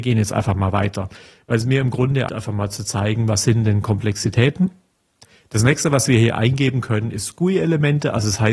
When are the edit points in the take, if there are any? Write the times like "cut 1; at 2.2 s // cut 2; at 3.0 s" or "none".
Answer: cut 1; at 2.3 s